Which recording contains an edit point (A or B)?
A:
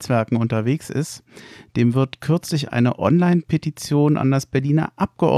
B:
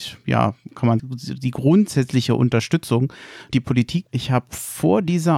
B